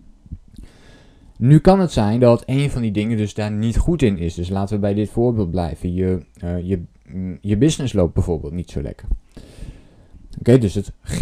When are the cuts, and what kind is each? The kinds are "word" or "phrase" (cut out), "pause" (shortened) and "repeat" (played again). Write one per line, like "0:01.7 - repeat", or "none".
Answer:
none

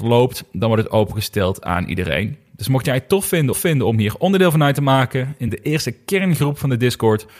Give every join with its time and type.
0:03.5 - repeat
0:05.5 - word

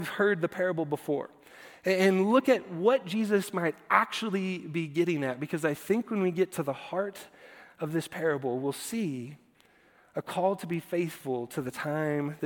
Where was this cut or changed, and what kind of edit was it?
none

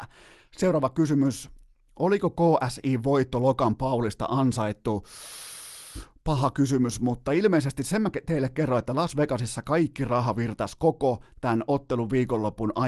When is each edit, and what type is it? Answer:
none

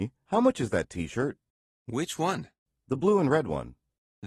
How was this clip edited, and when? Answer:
none

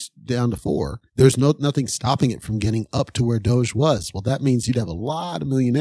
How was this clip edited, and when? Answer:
0:01.1 - pause

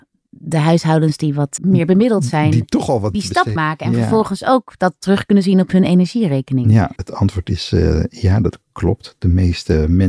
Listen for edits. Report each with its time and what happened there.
0:01.6 - word
0:03.1 - word
0:03.6 - word
0:07.0 - word

